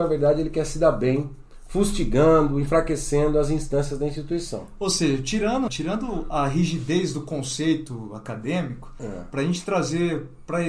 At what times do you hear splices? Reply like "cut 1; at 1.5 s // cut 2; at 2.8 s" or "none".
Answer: cut 1; at 5.7 s